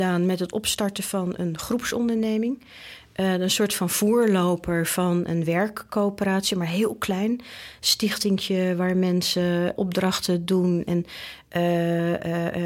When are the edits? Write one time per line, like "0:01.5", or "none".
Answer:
0:09.8